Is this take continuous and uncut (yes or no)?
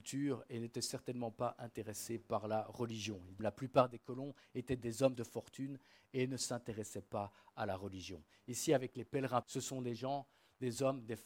no